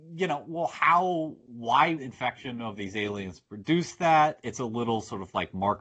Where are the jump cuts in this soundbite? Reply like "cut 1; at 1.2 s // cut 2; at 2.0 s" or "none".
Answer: cut 1; at 2.0 s